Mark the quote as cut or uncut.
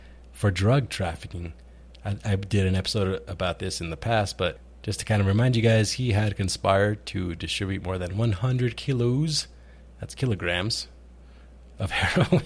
uncut